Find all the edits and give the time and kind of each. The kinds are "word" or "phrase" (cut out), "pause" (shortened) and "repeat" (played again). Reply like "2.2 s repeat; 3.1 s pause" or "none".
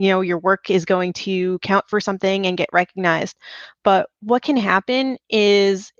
none